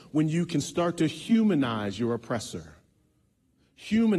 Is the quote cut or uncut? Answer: uncut